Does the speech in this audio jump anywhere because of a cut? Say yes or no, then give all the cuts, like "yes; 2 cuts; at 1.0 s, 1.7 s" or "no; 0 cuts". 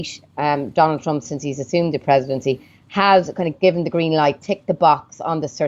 no; 0 cuts